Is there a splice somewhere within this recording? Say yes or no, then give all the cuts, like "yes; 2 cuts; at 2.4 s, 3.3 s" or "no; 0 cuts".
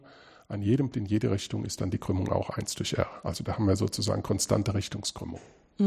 yes; 1 cut; at 0.9 s